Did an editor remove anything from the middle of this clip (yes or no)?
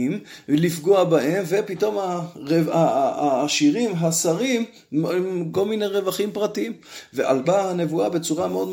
yes